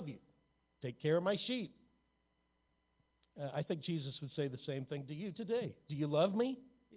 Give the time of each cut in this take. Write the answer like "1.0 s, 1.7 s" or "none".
none